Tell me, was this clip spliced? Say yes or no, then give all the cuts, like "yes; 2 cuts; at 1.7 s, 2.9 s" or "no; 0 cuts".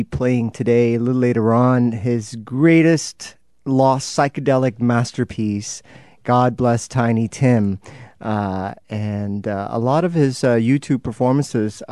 no; 0 cuts